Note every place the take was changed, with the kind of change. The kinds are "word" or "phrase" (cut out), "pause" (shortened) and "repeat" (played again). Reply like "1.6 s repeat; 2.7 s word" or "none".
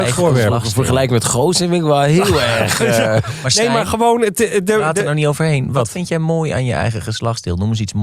none